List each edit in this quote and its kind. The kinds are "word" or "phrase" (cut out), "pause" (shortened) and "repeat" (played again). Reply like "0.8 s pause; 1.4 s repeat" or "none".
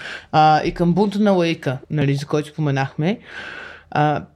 1.8 s pause